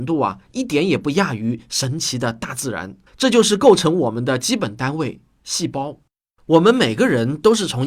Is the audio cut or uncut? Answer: cut